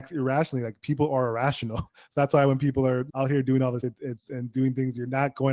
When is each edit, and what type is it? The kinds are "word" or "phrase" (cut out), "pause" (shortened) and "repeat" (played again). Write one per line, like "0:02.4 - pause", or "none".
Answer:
0:03.8 - word